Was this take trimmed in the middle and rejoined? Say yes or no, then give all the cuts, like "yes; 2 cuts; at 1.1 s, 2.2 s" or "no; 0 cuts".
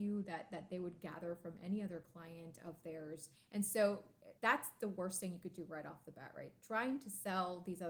yes; 2 cuts; at 3.4 s, 4.4 s